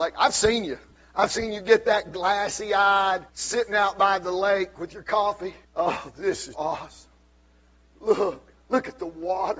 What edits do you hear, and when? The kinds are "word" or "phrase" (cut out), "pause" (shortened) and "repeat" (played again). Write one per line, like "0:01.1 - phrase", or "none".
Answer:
0:03.3 - pause
0:05.6 - pause
0:06.5 - word

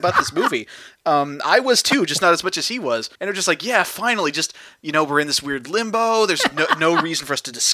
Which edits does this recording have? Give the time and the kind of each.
0:03.2 - pause

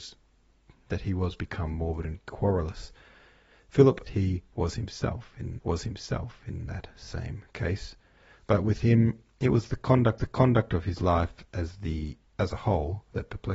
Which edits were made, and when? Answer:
0:04.1 - phrase
0:05.6 - repeat
0:10.2 - repeat
0:12.3 - pause

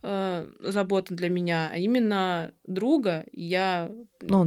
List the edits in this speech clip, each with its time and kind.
none

